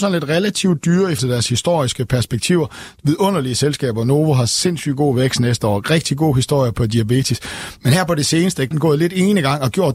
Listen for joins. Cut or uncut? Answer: cut